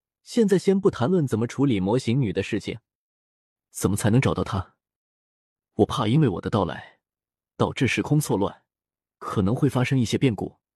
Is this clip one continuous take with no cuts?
yes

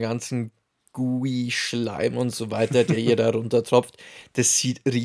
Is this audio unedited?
yes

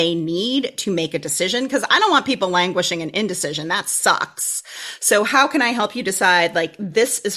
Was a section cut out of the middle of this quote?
no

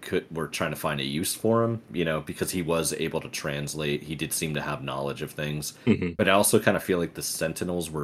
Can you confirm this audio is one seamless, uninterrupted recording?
yes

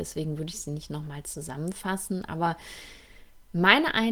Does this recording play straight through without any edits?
yes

